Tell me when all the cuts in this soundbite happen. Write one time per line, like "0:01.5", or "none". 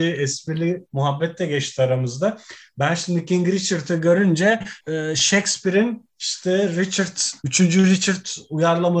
0:07.4